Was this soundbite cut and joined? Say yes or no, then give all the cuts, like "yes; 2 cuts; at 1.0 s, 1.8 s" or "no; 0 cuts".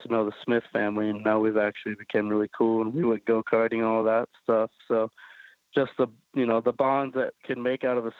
no; 0 cuts